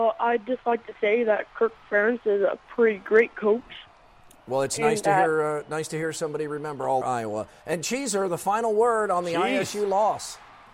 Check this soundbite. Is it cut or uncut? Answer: cut